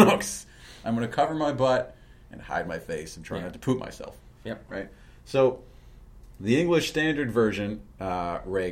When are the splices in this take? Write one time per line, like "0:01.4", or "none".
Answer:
none